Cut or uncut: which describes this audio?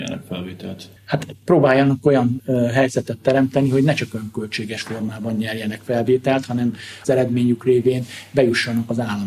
cut